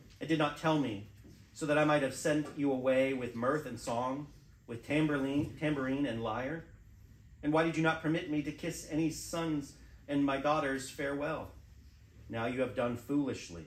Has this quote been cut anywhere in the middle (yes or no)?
no